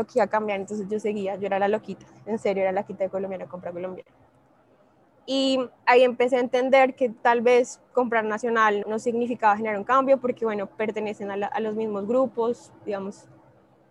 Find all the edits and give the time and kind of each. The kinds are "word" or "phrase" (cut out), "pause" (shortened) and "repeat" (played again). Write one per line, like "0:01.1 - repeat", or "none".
0:05.8 - pause
0:07.9 - word
0:08.8 - word